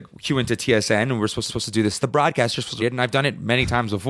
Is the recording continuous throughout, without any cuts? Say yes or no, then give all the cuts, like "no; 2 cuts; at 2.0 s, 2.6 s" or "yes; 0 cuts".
no; 3 cuts; at 1.5 s, 2.0 s, 2.8 s